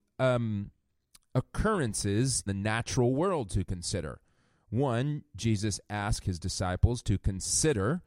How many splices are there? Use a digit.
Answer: 1